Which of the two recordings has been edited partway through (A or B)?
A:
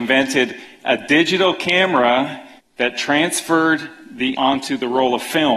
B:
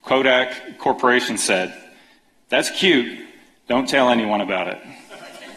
A